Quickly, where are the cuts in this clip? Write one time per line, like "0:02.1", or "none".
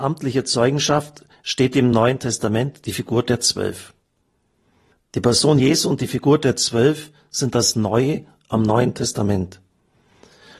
none